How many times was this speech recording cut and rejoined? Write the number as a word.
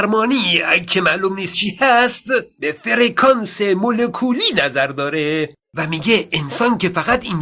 two